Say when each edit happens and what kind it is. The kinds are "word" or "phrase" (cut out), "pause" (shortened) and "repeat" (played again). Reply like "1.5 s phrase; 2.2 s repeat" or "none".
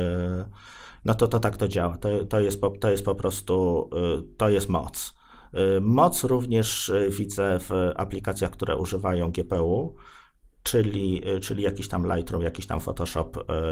none